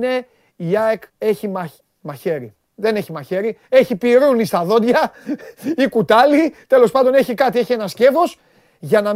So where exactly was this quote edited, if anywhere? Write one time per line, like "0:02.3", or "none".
0:01.1
0:01.8